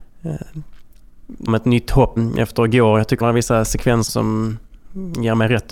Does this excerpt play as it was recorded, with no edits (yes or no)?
no